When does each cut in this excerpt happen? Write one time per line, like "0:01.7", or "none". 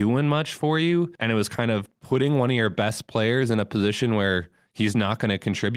0:01.2